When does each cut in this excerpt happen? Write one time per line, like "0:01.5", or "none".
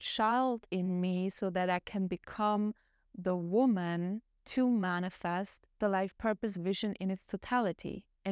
none